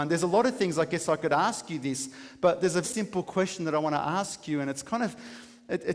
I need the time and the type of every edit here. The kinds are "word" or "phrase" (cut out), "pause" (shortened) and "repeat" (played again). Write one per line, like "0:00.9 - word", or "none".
0:02.8 - word